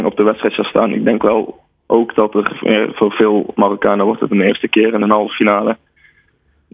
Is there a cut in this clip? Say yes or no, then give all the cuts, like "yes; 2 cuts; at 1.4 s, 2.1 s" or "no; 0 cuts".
no; 0 cuts